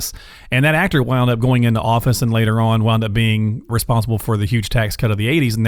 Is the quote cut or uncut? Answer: uncut